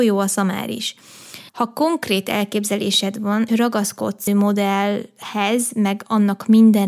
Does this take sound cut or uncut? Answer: cut